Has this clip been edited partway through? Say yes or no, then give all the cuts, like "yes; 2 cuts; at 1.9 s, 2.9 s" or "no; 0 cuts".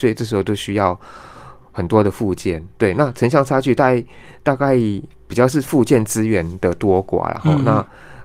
yes; 1 cut; at 2.7 s